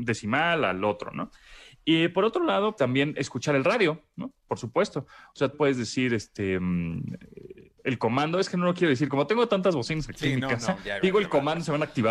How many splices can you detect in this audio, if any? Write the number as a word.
two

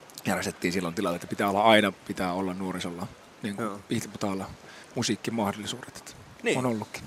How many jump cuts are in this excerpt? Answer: one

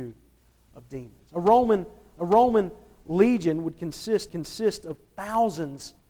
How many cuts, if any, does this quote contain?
two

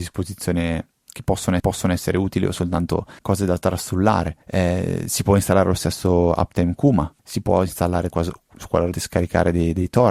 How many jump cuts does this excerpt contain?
six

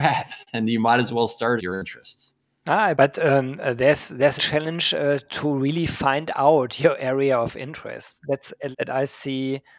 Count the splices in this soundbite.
four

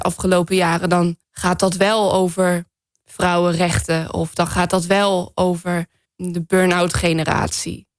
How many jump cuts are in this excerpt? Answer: two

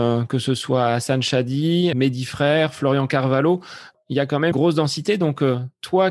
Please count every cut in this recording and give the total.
two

